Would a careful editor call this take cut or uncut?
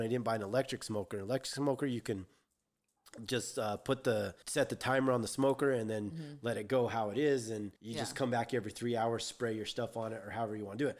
cut